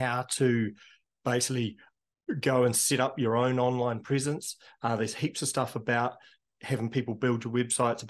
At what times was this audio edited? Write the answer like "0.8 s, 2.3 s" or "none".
none